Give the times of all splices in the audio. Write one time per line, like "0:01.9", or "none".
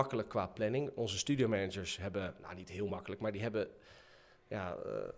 none